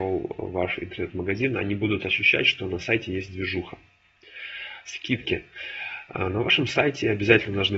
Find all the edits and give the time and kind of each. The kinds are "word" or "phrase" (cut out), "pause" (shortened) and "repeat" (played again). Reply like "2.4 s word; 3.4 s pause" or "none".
none